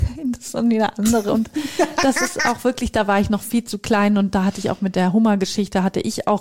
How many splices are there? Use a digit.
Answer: 0